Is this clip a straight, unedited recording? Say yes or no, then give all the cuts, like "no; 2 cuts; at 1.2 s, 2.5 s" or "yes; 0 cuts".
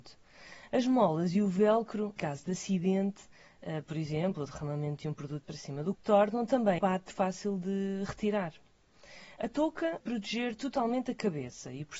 no; 6 cuts; at 2.2 s, 5.4 s, 5.9 s, 6.8 s, 7.1 s, 10.0 s